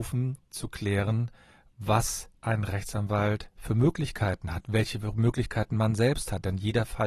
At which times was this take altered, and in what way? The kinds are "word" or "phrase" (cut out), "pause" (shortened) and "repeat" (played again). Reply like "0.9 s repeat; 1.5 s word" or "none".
2.3 s pause; 3.5 s pause